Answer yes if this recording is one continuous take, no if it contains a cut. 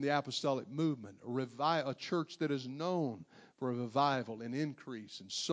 yes